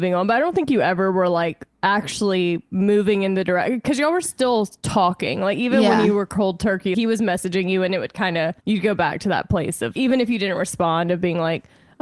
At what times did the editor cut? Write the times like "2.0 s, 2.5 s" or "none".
1.7 s, 6.9 s, 8.6 s, 10.0 s